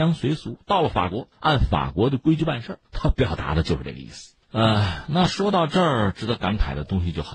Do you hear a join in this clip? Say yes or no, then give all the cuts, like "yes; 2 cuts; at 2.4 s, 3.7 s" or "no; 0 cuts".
yes; 3 cuts; at 1.3 s, 2.8 s, 4.4 s